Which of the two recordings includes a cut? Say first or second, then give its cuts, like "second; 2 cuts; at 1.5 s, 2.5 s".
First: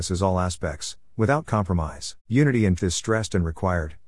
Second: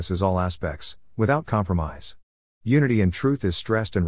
first; 2 cuts; at 2.2 s, 2.8 s